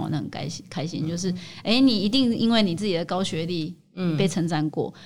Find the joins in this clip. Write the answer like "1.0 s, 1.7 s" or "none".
none